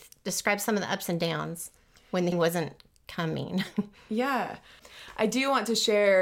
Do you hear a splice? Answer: yes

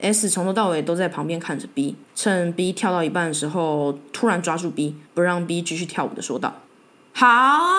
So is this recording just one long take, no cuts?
no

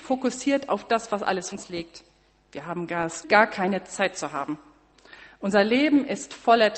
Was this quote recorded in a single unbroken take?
no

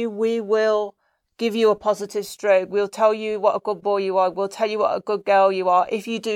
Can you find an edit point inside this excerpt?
no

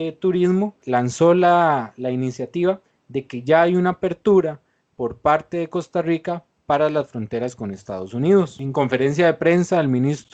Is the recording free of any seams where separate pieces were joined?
yes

